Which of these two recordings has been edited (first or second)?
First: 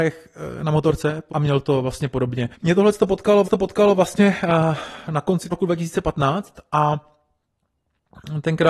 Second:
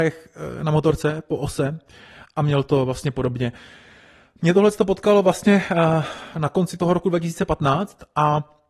first